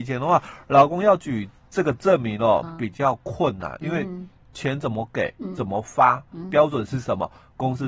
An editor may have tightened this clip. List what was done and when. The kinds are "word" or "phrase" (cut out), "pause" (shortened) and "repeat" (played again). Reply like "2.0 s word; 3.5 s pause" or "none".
none